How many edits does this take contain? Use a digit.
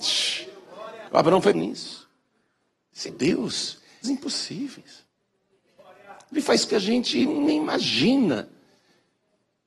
6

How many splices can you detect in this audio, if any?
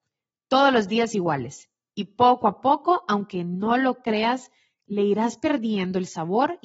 0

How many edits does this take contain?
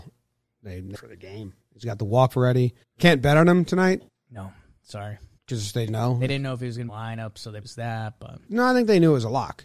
9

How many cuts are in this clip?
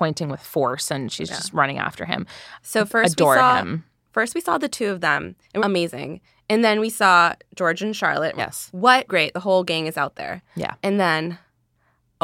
4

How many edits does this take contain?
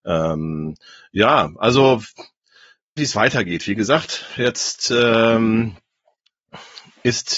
2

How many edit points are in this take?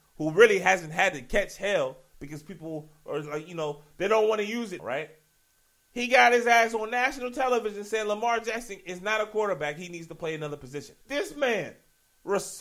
3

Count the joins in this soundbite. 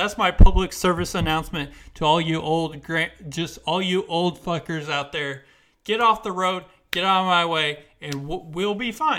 0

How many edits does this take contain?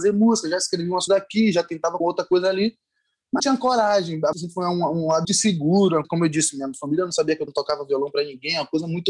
7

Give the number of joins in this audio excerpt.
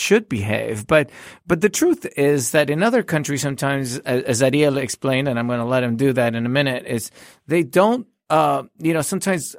0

